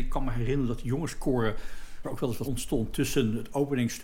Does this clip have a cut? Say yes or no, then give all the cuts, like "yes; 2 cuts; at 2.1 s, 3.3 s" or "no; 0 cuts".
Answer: yes; 2 cuts; at 2.0 s, 2.4 s